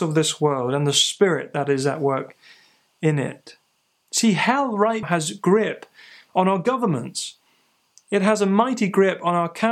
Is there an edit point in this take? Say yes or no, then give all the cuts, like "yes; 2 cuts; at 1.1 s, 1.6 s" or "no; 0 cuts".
yes; 1 cut; at 5.0 s